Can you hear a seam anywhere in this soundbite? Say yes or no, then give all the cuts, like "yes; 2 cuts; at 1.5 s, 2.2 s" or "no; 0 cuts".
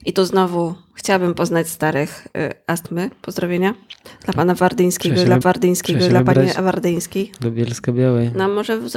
yes; 2 cuts; at 2.3 s, 5.4 s